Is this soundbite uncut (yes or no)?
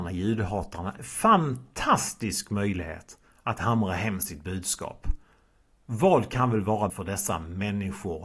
no